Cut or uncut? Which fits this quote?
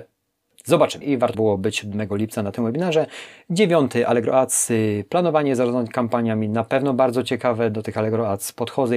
cut